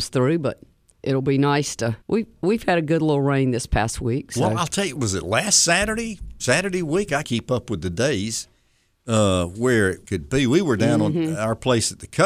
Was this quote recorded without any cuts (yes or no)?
no